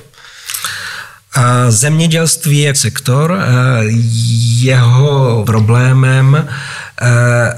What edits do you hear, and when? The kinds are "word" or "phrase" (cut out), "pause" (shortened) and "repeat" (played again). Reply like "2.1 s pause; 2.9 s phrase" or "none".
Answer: 2.7 s word; 5.4 s word